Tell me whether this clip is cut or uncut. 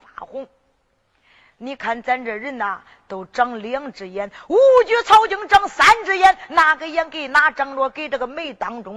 uncut